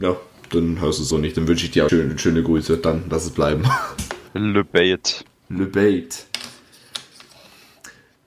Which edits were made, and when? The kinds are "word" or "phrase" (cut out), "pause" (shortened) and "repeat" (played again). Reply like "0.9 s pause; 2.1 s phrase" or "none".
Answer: 1.1 s phrase; 1.9 s word; 4.3 s pause